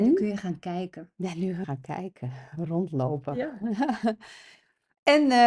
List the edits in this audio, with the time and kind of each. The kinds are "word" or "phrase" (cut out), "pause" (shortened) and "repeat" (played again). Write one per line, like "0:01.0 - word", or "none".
0:01.6 - word